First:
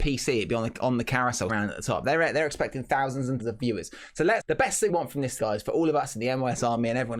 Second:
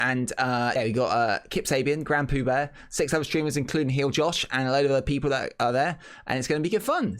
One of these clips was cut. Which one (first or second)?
first